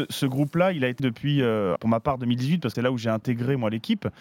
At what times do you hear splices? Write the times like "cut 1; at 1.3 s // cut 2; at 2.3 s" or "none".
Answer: cut 1; at 1.0 s // cut 2; at 1.8 s // cut 3; at 2.7 s